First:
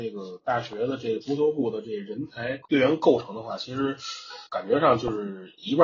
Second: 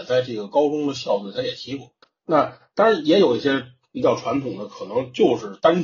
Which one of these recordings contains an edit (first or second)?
first